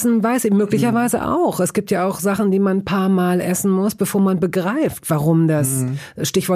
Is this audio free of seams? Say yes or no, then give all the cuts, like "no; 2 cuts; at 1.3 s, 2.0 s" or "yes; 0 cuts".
yes; 0 cuts